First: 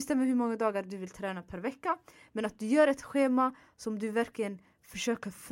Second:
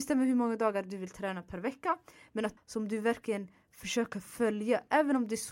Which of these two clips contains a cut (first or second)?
second